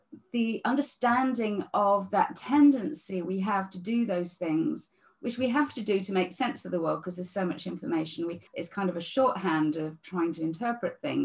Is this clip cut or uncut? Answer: cut